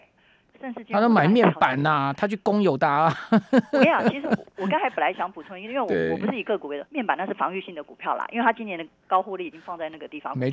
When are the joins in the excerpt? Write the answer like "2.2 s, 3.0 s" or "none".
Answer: 4.5 s, 6.9 s